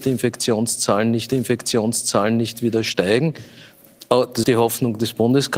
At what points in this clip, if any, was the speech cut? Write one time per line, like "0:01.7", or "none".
0:01.3
0:04.4